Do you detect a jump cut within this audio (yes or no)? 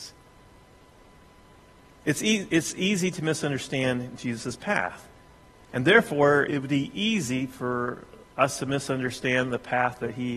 yes